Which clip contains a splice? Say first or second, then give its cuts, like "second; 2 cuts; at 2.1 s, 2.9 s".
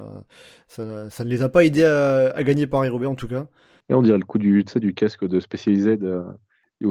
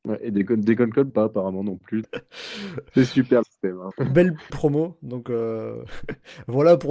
second; 5 cuts; at 1.1 s, 2.0 s, 3.4 s, 3.9 s, 4.5 s